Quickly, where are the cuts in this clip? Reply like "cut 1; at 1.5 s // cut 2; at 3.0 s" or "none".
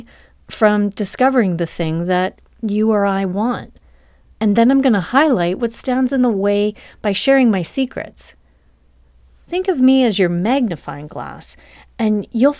none